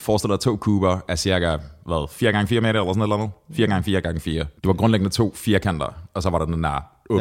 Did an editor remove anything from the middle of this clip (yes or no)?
yes